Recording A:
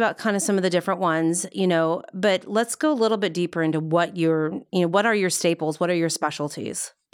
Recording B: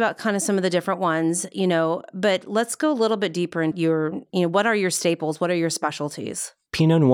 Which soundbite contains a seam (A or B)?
B